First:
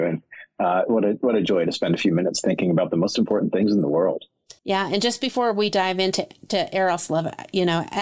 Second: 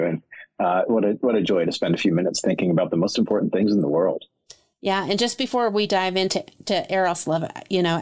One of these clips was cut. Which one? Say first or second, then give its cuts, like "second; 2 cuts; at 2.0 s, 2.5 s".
first; 1 cut; at 4.6 s